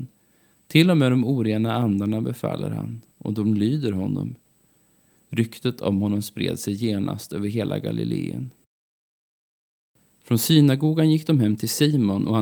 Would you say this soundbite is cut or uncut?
uncut